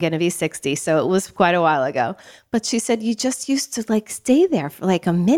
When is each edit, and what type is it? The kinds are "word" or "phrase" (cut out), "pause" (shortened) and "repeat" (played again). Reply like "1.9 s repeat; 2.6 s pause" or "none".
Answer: none